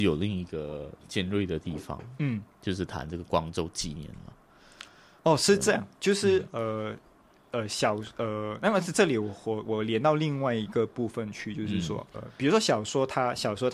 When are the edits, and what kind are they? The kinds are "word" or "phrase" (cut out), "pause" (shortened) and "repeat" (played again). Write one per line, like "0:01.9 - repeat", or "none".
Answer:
0:12.1 - word